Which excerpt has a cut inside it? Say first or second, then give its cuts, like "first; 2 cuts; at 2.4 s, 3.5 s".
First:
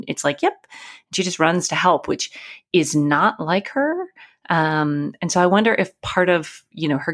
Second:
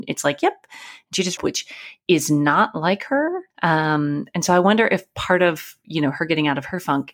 second; 2 cuts; at 1.4 s, 3.5 s